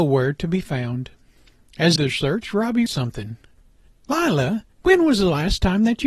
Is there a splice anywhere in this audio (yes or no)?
yes